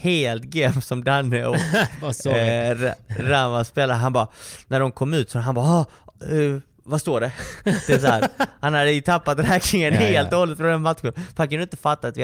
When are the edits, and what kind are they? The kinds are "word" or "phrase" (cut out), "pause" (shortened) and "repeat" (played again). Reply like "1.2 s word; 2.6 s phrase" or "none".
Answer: 6.7 s pause